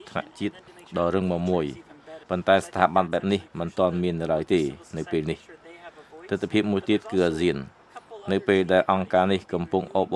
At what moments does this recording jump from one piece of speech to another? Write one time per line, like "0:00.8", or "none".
0:02.2